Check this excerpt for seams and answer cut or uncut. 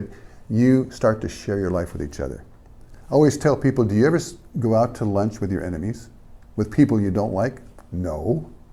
uncut